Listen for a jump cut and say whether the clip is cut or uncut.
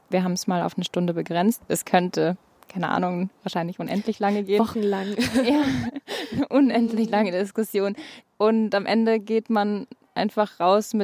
uncut